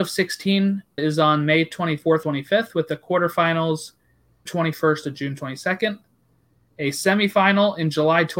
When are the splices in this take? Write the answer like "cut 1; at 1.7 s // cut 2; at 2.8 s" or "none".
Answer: cut 1; at 1.0 s // cut 2; at 2.2 s // cut 3; at 4.5 s